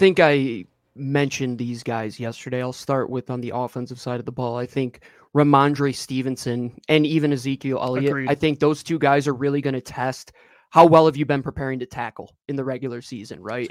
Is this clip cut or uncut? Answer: uncut